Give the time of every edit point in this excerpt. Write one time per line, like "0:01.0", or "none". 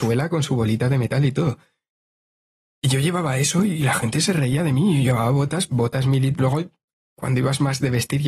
0:05.7